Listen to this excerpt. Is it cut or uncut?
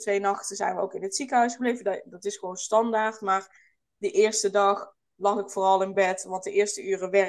uncut